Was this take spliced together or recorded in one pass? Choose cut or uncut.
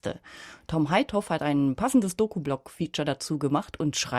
uncut